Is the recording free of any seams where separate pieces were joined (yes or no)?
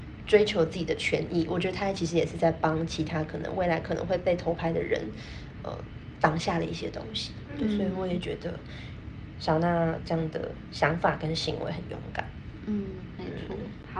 yes